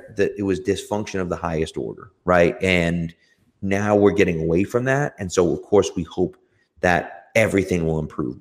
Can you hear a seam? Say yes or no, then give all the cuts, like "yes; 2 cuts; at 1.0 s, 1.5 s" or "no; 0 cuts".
no; 0 cuts